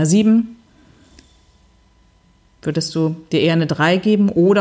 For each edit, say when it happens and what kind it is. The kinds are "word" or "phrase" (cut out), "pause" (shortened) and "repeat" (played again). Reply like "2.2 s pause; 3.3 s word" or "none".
none